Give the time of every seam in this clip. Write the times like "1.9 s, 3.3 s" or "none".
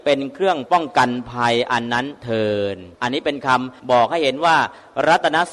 2.9 s, 3.8 s

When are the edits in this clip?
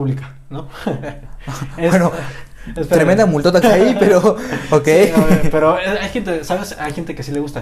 3.6 s

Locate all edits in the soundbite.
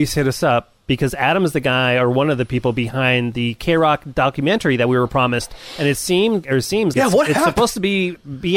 6.4 s, 6.9 s

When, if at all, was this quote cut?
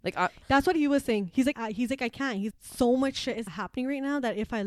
1.5 s, 2.5 s, 3.5 s

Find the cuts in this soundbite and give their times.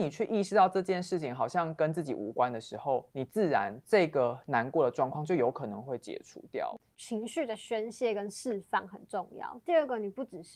3.1 s, 3.8 s

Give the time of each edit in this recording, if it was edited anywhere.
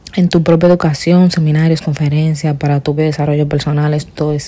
3.0 s

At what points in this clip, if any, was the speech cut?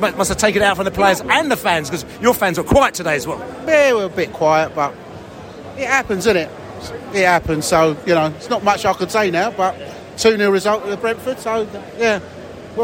none

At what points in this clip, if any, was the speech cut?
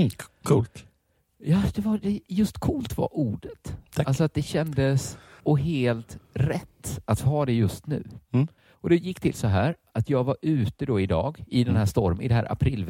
5.4 s, 8.6 s

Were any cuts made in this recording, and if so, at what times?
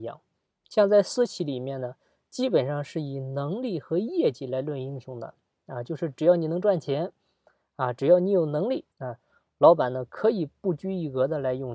8.9 s

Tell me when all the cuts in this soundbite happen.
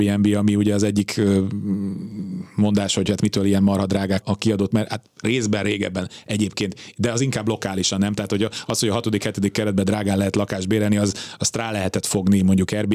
4.2 s, 4.7 s

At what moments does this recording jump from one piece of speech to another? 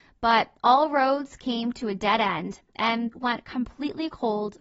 3.1 s

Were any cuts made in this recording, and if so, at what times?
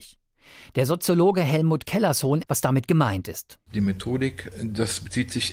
2.4 s

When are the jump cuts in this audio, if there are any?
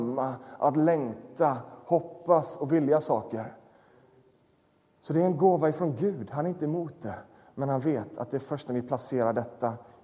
none

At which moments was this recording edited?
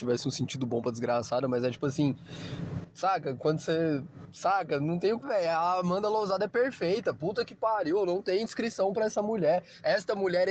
5.2 s

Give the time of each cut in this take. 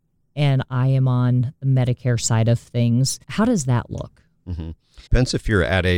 3.2 s, 5.1 s

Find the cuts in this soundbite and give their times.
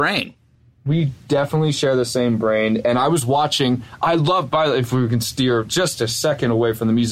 none

